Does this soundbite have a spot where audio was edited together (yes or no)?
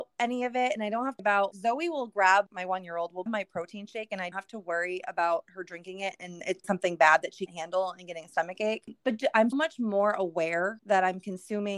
yes